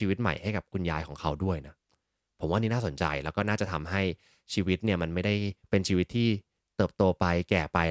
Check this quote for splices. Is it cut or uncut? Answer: uncut